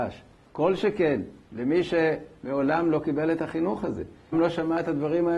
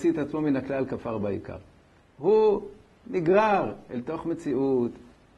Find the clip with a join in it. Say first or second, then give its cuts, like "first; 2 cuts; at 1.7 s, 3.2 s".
first; 1 cut; at 4.3 s